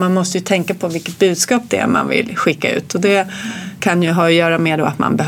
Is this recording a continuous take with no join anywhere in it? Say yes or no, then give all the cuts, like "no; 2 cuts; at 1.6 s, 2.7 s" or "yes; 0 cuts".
no; 1 cut; at 3.8 s